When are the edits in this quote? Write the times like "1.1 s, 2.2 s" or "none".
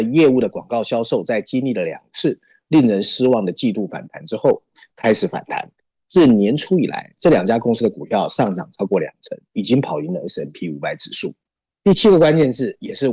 none